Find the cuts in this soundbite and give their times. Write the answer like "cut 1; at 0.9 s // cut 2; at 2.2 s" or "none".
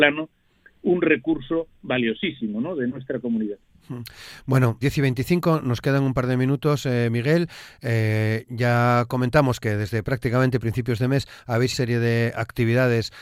cut 1; at 4.8 s // cut 2; at 11.7 s